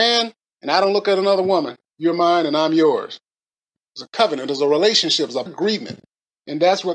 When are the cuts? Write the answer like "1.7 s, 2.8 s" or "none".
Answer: 5.5 s